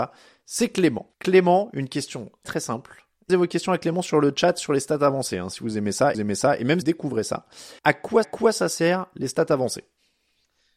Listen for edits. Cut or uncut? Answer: cut